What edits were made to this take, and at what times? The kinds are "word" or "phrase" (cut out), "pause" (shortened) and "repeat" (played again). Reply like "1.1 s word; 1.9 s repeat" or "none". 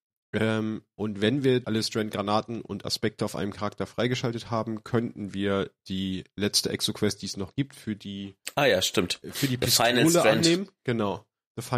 1.6 s word